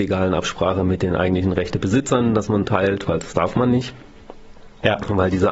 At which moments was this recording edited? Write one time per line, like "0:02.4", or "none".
0:02.6